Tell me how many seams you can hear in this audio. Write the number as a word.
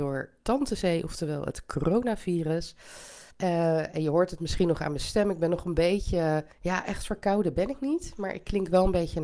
two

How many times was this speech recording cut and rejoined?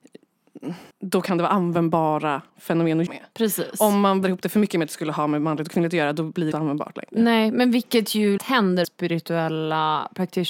seven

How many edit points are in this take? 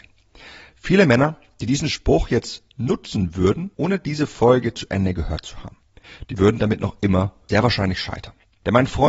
zero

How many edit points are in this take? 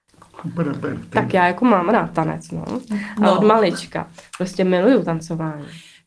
zero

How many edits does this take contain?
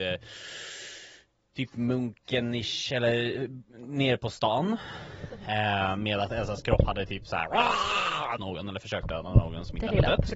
one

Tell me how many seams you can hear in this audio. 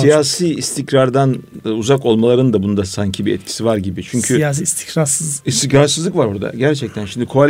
zero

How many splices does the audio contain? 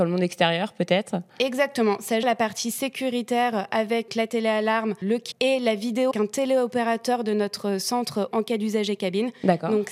six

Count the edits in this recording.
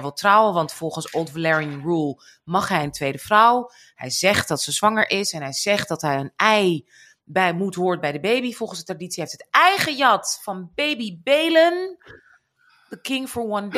zero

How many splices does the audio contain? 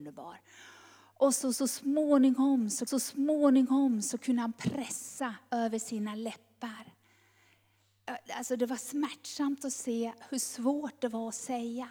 one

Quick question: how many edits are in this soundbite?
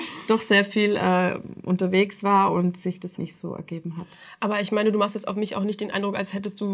one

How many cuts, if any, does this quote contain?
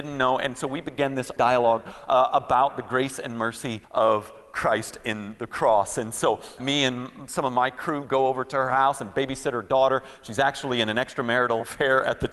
three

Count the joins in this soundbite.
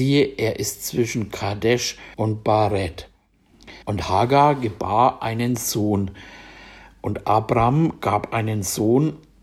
two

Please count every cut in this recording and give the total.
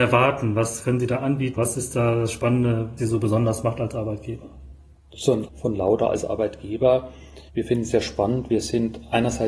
five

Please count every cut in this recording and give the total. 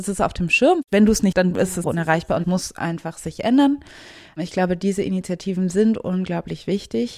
three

